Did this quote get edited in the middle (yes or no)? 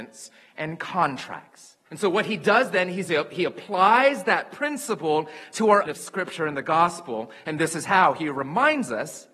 yes